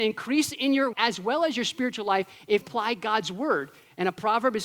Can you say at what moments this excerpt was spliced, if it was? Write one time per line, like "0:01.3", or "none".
0:00.9
0:02.6